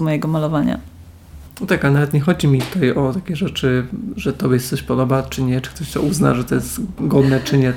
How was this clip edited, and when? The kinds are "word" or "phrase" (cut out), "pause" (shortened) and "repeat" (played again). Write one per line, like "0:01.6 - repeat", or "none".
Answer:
none